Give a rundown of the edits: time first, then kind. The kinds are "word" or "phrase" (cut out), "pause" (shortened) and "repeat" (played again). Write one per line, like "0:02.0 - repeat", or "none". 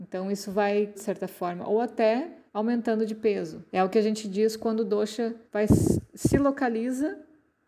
0:00.9 - word
0:02.5 - pause
0:03.7 - pause
0:05.5 - pause